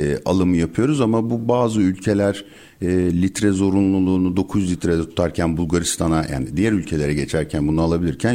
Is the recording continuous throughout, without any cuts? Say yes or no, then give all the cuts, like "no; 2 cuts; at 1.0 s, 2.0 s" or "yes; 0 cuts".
yes; 0 cuts